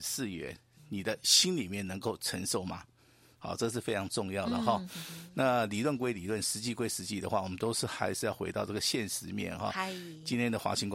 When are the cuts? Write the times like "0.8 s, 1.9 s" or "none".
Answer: none